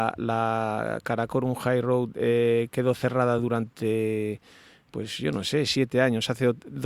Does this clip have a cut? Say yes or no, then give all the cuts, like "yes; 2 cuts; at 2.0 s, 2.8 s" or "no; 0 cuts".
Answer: no; 0 cuts